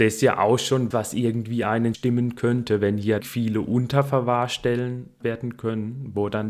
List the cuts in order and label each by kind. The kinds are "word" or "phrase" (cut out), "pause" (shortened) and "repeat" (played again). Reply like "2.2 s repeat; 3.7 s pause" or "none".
0.9 s word; 1.9 s word; 3.2 s phrase; 5.2 s word